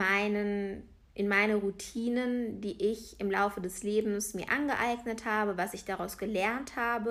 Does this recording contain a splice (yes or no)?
no